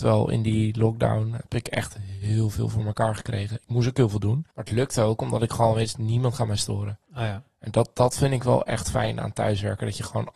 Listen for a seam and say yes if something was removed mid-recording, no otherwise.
yes